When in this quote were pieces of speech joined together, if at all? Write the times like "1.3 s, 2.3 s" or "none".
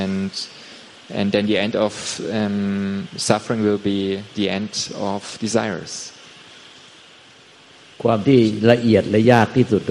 none